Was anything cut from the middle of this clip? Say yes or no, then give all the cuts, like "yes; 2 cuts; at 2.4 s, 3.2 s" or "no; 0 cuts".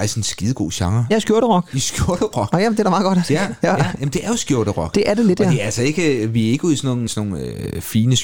yes; 1 cut; at 7.1 s